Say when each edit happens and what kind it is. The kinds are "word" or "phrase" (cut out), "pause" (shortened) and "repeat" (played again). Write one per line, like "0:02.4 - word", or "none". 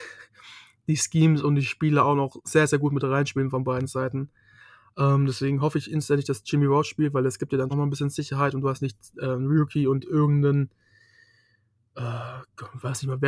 0:07.7 - word